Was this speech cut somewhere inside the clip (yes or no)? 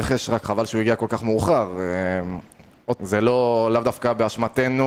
yes